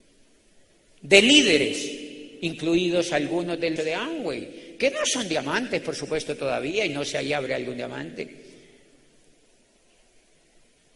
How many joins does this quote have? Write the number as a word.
two